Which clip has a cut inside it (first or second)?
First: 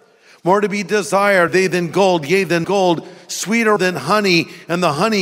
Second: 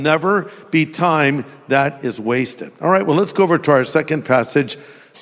first